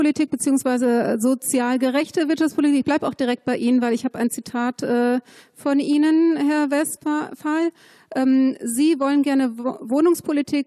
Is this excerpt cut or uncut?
uncut